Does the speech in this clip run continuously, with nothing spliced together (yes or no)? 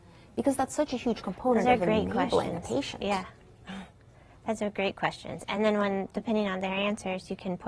yes